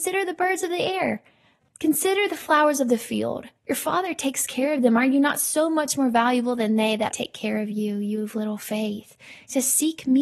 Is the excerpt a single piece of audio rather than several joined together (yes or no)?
no